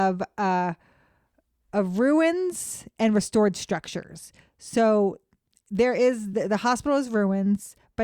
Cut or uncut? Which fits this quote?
uncut